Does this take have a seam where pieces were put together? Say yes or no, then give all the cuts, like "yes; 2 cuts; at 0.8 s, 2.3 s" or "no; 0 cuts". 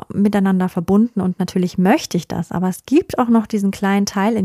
no; 0 cuts